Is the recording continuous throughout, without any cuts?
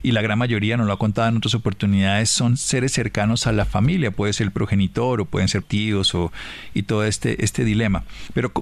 no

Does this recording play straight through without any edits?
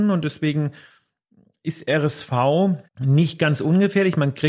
no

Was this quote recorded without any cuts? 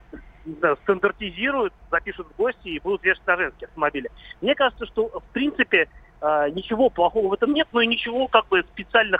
yes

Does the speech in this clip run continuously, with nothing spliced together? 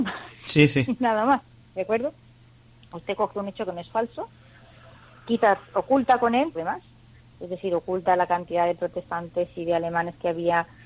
no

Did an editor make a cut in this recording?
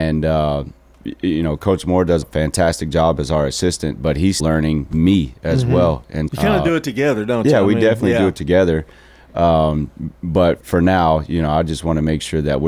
yes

